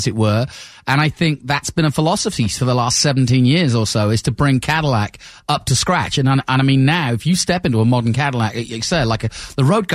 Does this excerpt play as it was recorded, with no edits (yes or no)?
yes